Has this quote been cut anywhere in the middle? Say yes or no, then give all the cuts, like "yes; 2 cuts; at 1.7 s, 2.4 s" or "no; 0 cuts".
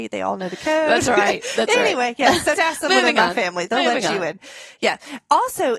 yes; 1 cut; at 2.5 s